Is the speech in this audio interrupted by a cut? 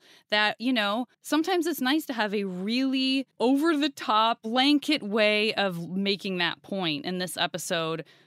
yes; 2 cuts; at 1.1 s, 3.3 s

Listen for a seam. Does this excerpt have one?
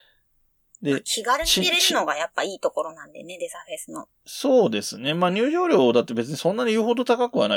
yes; 1 cut; at 4.2 s

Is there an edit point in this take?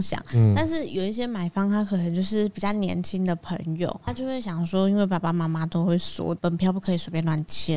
yes; 1 cut; at 4.1 s

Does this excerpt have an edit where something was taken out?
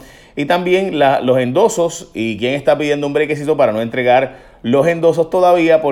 no; 0 cuts

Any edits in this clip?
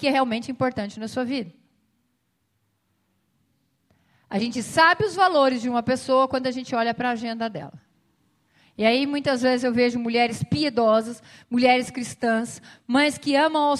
no; 0 cuts

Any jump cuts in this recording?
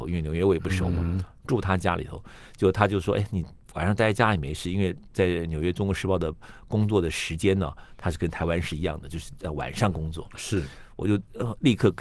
no; 0 cuts

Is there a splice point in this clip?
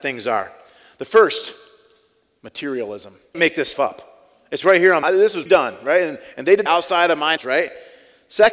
yes; 6 cuts; at 3.3 s, 3.7 s, 5.0 s, 5.5 s, 6.7 s, 7.4 s

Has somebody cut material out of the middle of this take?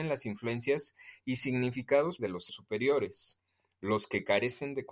yes; 2 cuts; at 2.2 s, 2.5 s

